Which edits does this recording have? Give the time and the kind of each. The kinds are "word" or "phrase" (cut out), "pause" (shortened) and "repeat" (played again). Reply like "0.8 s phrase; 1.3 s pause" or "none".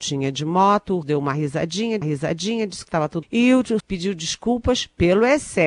1.0 s word; 2.0 s repeat; 3.2 s word; 3.8 s word